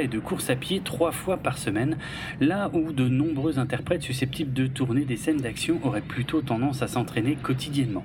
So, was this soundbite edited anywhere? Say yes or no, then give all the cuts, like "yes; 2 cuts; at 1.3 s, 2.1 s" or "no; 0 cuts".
no; 0 cuts